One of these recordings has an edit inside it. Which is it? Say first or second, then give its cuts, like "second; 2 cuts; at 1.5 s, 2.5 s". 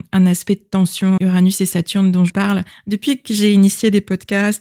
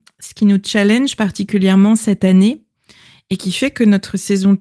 first; 3 cuts; at 1.2 s, 2.3 s, 2.7 s